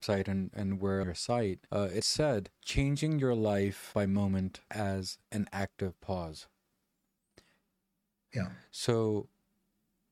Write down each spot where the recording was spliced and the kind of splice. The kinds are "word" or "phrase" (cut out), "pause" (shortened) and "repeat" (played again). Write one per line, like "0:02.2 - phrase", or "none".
0:01.0 - phrase
0:01.7 - pause
0:02.0 - word
0:02.6 - pause
0:03.9 - word
0:04.7 - word
0:05.2 - pause